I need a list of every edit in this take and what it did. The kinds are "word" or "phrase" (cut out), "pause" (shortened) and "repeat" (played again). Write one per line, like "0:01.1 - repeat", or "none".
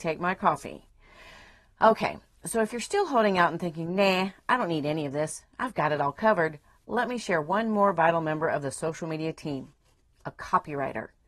none